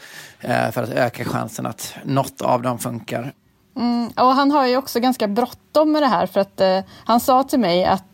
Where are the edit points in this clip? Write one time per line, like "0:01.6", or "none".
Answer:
none

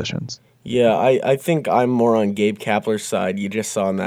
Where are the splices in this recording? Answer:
none

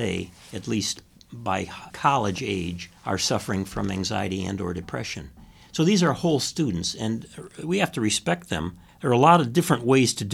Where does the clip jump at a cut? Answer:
0:01.9
0:03.0
0:08.9

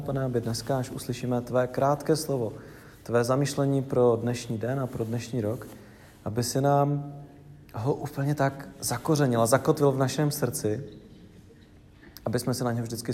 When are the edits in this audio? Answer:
none

